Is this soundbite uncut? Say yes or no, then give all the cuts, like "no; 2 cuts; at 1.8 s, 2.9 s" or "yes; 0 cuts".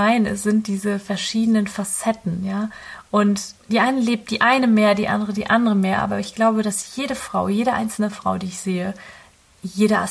yes; 0 cuts